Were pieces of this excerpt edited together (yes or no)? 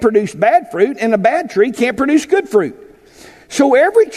no